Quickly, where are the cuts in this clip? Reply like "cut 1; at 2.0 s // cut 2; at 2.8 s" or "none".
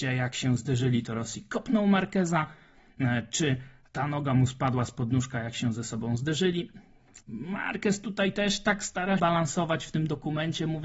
cut 1; at 7.2 s // cut 2; at 9.2 s

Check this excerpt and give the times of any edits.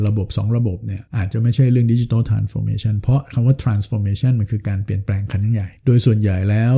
cut 1; at 1.1 s // cut 2; at 5.8 s

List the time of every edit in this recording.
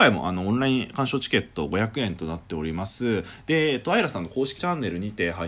cut 1; at 4.6 s

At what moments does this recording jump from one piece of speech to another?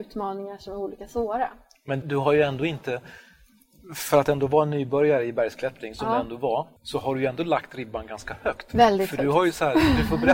cut 1; at 2.0 s // cut 2; at 6.8 s

